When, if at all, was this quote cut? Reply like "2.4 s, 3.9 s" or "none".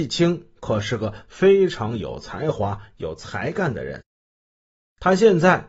none

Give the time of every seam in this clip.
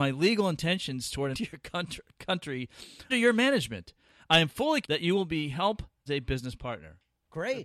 1.3 s, 3.1 s, 4.8 s, 6.1 s

